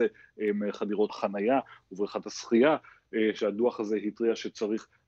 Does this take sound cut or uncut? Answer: cut